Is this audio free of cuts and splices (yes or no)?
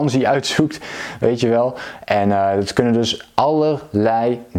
yes